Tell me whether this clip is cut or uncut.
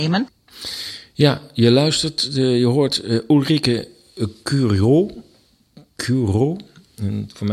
uncut